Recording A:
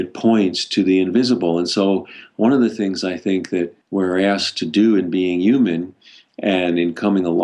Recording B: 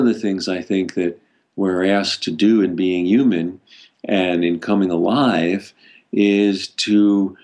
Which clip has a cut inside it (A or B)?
A